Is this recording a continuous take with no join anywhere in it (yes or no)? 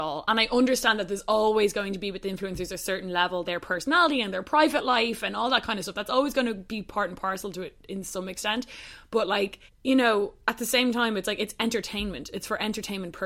no